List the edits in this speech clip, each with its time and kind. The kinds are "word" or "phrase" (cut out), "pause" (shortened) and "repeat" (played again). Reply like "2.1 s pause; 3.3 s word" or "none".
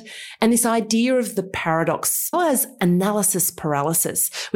2.3 s phrase